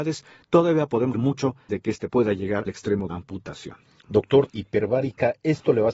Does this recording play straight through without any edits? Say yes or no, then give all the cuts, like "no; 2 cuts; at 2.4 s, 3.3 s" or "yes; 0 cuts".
no; 6 cuts; at 1.1 s, 1.7 s, 2.1 s, 2.7 s, 3.1 s, 4.5 s